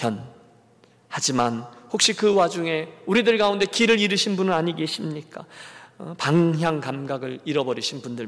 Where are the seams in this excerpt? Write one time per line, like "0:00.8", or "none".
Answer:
none